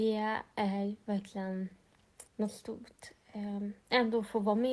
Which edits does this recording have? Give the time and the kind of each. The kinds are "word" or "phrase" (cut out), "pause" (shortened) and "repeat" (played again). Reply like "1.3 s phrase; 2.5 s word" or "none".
2.3 s pause

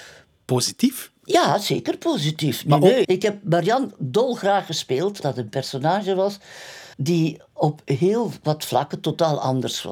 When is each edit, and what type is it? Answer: 3.0 s word; 5.2 s word; 6.9 s pause

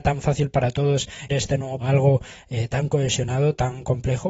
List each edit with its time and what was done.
1.3 s word; 1.8 s phrase

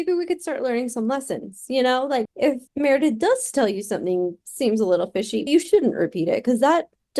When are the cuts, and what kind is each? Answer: 2.2 s word; 2.7 s pause; 5.5 s word

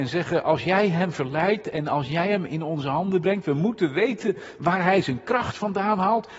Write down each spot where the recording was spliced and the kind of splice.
none

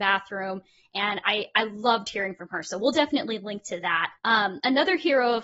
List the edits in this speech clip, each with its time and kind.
4.2 s pause

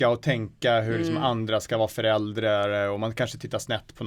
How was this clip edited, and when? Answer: none

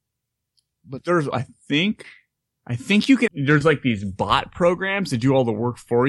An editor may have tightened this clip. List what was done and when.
1.0 s word; 1.3 s word; 2.4 s pause; 3.3 s word

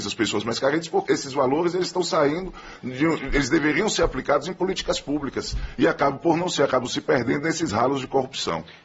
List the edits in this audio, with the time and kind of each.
1.1 s word

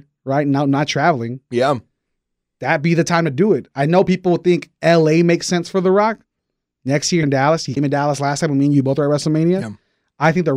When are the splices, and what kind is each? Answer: 7.2 s word; 7.8 s word

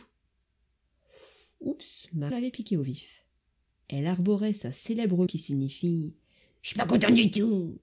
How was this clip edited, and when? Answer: 2.3 s word; 5.3 s word

